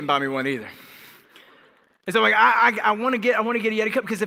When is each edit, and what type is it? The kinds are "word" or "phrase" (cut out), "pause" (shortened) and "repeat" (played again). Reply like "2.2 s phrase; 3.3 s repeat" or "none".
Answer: none

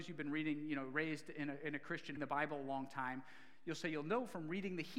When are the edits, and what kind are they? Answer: 2.2 s phrase

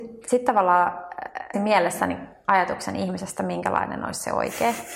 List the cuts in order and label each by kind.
1.5 s phrase

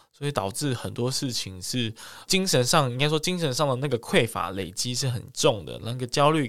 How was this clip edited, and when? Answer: 2.3 s word

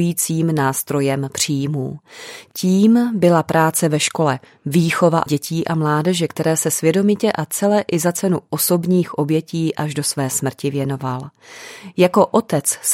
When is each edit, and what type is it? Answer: 5.3 s word

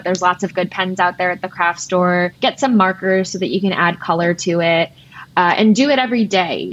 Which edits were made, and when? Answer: 2.4 s pause

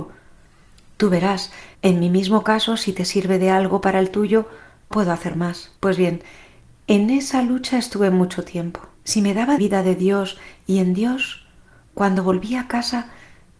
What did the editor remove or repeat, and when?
1.7 s pause; 4.9 s word; 5.8 s pause; 8.9 s pause; 9.6 s phrase

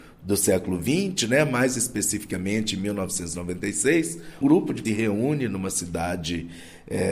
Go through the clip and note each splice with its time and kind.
4.4 s word; 4.8 s phrase

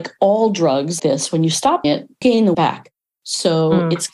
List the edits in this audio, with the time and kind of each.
1.0 s word; 1.8 s word; 2.2 s word; 2.5 s word

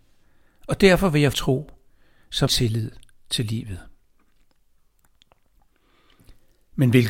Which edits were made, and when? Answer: 1.3 s phrase; 2.5 s word

